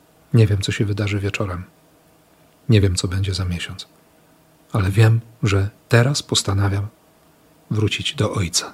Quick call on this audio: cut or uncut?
uncut